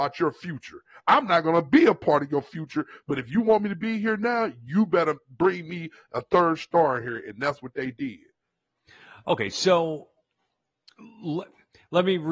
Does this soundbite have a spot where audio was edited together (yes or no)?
no